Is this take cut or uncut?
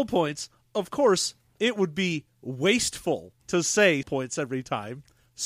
cut